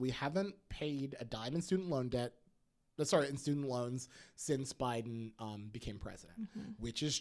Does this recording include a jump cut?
no; 0 cuts

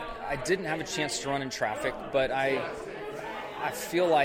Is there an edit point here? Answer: no; 0 cuts

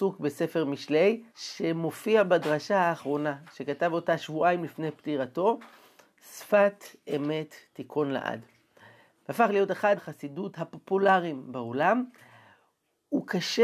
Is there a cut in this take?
yes; 2 cuts; at 1.3 s, 10.0 s

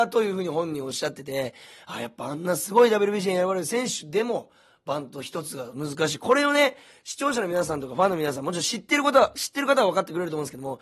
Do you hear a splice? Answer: no; 0 cuts

